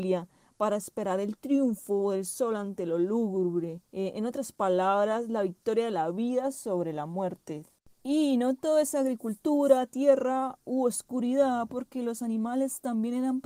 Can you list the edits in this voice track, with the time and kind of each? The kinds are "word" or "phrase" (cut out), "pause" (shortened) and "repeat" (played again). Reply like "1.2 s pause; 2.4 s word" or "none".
3.8 s pause